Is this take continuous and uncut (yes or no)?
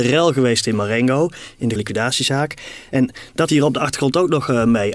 no